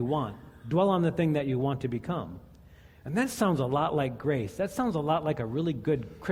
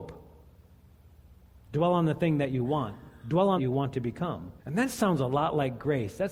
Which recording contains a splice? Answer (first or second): second